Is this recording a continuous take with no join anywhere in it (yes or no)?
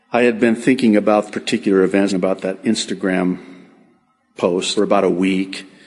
no